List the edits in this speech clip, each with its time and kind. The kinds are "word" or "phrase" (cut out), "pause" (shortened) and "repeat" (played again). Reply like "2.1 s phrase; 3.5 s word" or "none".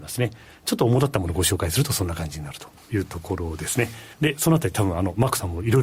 2.8 s pause; 4.1 s pause